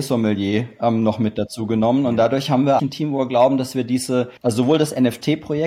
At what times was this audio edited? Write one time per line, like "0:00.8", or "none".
0:02.8
0:04.4